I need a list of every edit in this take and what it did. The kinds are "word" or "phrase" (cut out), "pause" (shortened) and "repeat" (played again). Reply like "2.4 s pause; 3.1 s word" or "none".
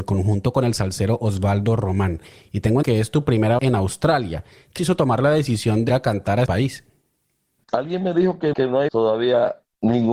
2.8 s word; 3.6 s word; 4.8 s word; 5.9 s word; 6.5 s word; 8.5 s word; 8.9 s word